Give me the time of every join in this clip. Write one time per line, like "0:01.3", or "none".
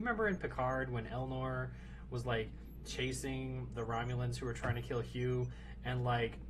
none